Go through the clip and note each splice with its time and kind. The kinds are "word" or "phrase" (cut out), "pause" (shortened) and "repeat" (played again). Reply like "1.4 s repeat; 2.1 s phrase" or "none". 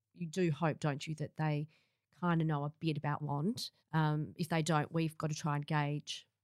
3.2 s phrase; 3.8 s pause